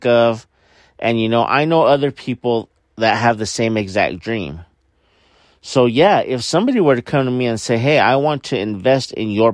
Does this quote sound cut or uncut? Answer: uncut